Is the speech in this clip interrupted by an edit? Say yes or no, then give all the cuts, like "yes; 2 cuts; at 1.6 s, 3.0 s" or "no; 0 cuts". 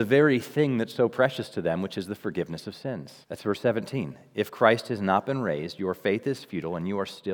yes; 1 cut; at 3.2 s